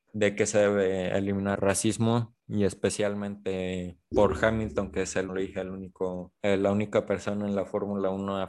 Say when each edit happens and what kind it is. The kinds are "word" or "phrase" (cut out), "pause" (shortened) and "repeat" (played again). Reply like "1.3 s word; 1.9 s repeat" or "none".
1.6 s word; 2.4 s pause; 4.1 s word; 5.3 s phrase; 6.4 s pause